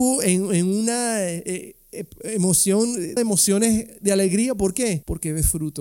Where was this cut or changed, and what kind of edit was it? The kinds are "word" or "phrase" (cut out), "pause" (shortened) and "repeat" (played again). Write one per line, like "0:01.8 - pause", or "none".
0:03.2 - word